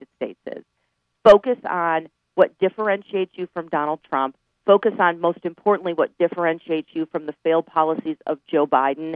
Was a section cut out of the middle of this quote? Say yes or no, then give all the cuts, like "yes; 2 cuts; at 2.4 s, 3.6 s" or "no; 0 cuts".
no; 0 cuts